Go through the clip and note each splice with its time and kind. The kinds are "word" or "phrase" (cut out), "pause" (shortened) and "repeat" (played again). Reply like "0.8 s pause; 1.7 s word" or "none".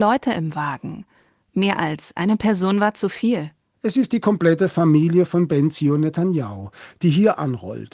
none